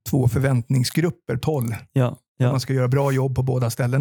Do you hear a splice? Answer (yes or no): yes